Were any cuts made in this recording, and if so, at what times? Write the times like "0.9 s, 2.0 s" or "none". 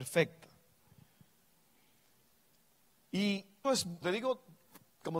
3.6 s, 4.0 s